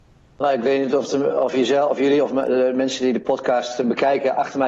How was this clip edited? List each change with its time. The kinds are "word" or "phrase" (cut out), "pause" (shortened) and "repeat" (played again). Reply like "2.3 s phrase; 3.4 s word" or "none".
none